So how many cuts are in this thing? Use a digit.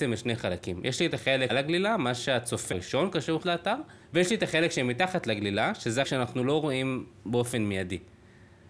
5